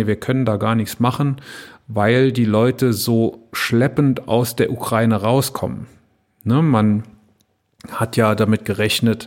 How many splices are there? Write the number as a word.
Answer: zero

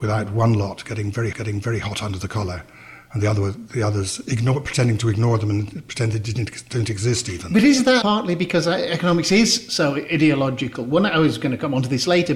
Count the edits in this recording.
two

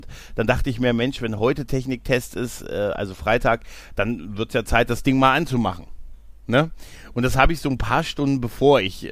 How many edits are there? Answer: zero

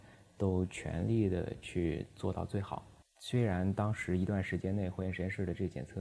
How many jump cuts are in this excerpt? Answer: one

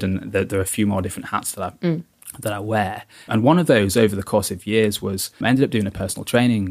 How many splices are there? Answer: two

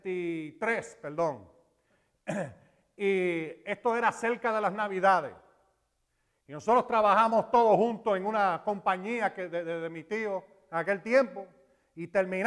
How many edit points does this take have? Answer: zero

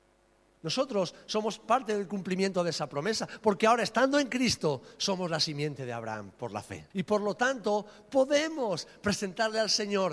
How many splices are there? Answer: one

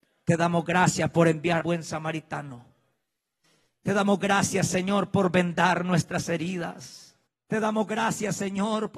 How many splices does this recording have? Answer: two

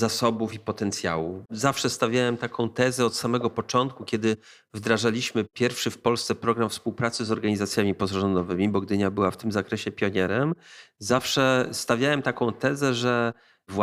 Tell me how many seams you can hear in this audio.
one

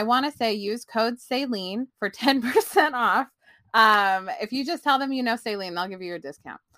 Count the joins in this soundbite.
one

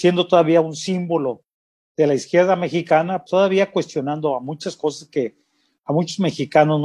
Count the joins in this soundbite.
one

